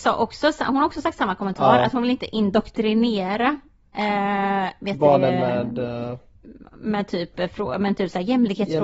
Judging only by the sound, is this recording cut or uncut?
uncut